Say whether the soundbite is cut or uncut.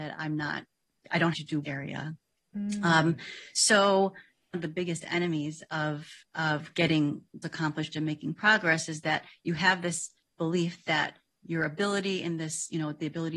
cut